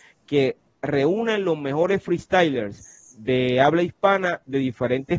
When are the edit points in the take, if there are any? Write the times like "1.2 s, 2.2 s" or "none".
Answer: none

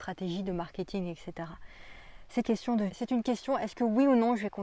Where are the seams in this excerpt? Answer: 2.4 s, 2.9 s

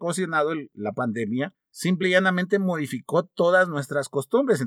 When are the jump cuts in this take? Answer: none

